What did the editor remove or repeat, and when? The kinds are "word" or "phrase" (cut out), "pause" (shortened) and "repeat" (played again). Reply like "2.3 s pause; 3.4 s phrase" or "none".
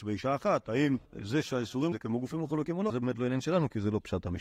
1.1 s pause; 1.9 s word; 2.9 s word